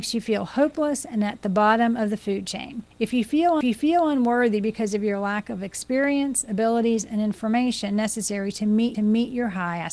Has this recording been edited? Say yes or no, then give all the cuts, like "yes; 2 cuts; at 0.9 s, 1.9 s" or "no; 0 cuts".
yes; 3 cuts; at 2.9 s, 3.6 s, 8.9 s